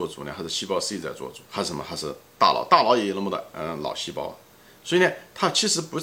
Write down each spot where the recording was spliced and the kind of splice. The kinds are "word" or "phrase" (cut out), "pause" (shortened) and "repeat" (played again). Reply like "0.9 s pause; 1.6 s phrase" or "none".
1.4 s pause